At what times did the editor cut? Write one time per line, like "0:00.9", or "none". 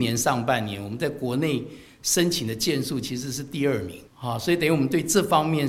0:04.1